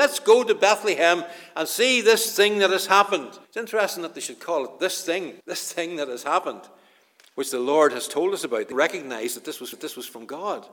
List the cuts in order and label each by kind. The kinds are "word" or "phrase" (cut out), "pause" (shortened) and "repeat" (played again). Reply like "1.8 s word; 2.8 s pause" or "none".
3.4 s pause; 5.4 s pause; 8.7 s word; 9.7 s repeat